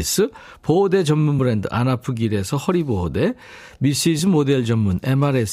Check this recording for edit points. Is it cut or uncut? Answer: uncut